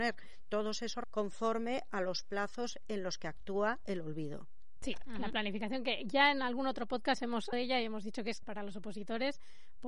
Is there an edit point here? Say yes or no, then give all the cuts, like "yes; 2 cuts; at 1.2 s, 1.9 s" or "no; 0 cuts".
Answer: yes; 3 cuts; at 1.0 s, 7.5 s, 8.4 s